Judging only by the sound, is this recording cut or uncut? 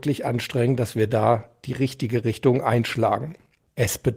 uncut